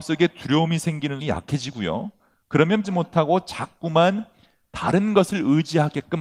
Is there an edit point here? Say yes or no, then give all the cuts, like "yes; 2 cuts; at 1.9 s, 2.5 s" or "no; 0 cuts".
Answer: yes; 2 cuts; at 1.2 s, 2.8 s